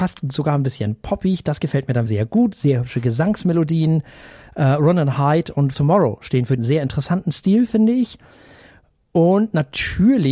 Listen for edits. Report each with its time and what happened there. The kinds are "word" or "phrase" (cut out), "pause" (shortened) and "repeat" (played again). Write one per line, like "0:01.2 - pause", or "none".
0:02.1 - word
0:05.7 - word
0:06.6 - word